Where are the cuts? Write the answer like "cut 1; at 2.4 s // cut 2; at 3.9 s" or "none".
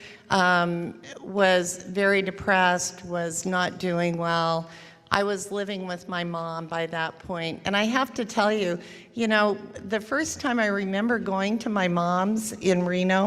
none